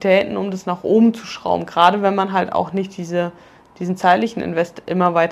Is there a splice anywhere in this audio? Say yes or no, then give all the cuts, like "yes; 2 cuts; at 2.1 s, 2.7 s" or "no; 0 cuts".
no; 0 cuts